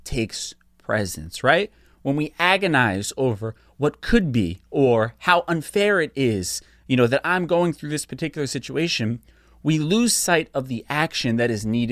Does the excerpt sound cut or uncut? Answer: uncut